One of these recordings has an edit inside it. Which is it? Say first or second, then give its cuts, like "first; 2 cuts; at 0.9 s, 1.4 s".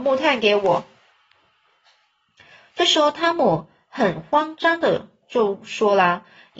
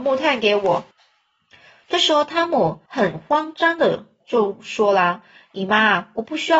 second; 2 cuts; at 0.9 s, 2.9 s